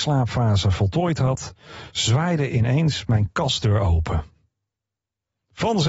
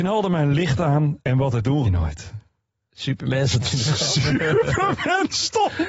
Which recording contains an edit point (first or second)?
second